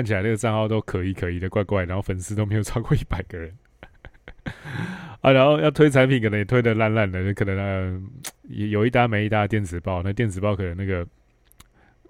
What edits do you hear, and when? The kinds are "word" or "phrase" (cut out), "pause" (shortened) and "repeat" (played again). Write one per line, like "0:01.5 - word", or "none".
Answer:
0:08.3 - pause